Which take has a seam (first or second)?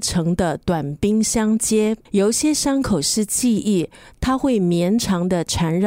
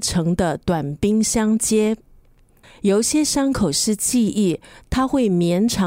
first